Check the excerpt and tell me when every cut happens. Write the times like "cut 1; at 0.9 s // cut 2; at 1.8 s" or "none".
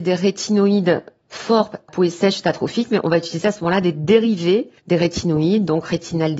cut 1; at 1.9 s // cut 2; at 4.8 s